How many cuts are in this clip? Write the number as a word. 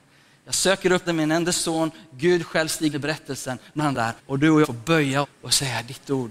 six